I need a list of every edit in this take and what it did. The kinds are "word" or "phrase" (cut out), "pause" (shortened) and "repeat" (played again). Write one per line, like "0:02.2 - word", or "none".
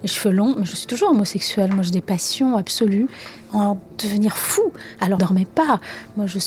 0:03.9 - pause
0:05.2 - phrase